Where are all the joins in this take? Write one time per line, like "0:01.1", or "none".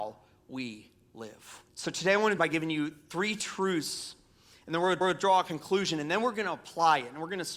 0:01.7
0:02.4
0:05.0